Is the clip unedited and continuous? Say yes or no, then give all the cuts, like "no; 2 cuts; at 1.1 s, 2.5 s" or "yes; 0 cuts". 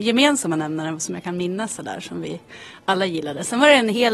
yes; 0 cuts